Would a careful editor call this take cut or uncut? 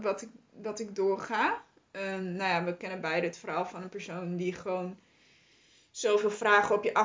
uncut